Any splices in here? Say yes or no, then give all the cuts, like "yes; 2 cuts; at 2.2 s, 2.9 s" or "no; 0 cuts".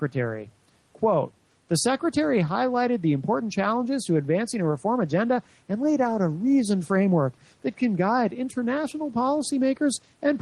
no; 0 cuts